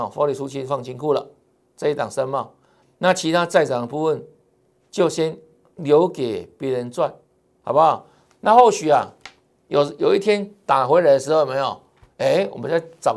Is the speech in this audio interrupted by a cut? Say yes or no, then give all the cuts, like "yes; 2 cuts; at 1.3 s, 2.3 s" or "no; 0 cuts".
no; 0 cuts